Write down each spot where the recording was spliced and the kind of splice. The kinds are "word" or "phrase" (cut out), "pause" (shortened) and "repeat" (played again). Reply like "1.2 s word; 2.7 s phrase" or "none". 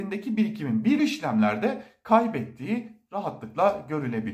1.0 s phrase